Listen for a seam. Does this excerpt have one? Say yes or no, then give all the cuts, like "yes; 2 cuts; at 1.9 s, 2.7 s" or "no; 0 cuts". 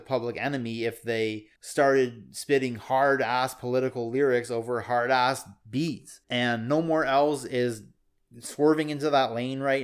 yes; 2 cuts; at 1.6 s, 6.2 s